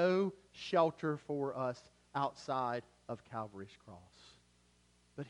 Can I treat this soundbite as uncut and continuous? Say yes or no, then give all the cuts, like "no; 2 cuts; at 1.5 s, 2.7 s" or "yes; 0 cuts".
yes; 0 cuts